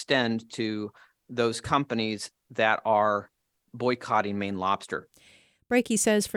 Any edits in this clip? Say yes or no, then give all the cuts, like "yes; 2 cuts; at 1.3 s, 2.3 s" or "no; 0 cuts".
no; 0 cuts